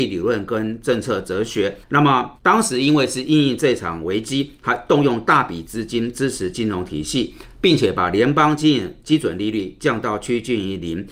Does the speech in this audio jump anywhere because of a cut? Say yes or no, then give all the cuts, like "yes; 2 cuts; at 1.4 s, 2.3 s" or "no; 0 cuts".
yes; 2 cuts; at 1.8 s, 2.4 s